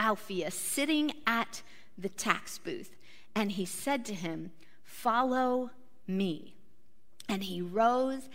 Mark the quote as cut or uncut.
uncut